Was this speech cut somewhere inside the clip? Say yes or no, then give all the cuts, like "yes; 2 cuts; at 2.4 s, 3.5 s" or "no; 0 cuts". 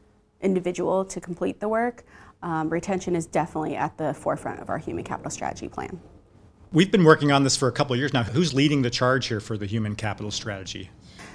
no; 0 cuts